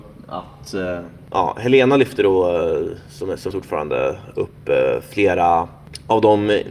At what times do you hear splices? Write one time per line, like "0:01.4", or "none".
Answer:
0:03.5